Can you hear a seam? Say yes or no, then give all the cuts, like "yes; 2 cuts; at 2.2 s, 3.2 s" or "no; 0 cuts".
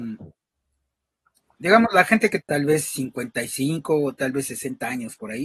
yes; 1 cut; at 2.4 s